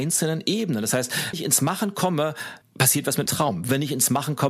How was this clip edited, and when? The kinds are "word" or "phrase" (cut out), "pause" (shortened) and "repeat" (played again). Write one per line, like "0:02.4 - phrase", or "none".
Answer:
0:01.3 - word
0:02.6 - pause
0:03.3 - word

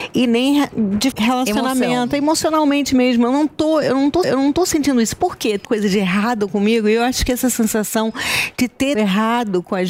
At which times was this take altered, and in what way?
0:01.1 - word
0:04.2 - repeat
0:05.6 - word
0:08.9 - word

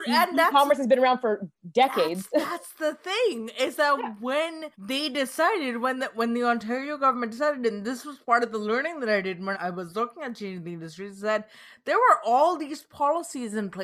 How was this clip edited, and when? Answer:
0:04.7 - pause
0:09.5 - word

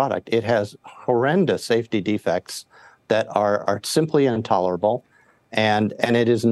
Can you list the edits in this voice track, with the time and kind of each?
none

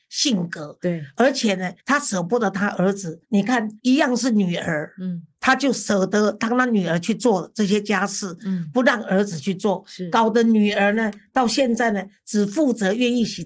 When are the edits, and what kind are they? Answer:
0:01.8 - pause
0:03.2 - pause
0:03.8 - pause

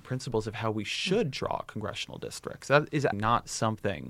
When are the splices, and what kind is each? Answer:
0:03.1 - word

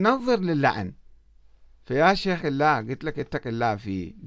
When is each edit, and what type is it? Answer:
0:01.7 - pause
0:02.4 - word

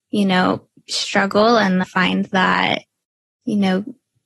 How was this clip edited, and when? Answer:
0:01.8 - word

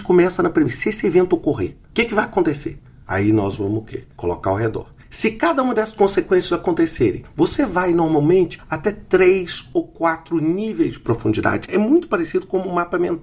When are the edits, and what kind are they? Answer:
0:04.1 - pause

